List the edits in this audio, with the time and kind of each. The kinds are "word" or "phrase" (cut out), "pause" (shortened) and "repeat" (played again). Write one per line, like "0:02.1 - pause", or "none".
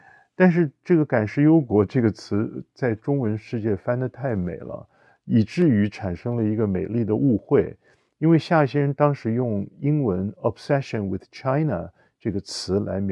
none